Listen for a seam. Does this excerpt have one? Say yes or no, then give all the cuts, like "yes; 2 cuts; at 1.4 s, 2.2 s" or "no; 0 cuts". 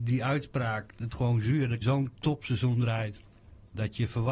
yes; 2 cuts; at 1.1 s, 1.8 s